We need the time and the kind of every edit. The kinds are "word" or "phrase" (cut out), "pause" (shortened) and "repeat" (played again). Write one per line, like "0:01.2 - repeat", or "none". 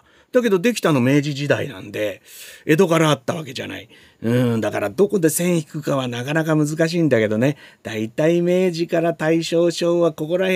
none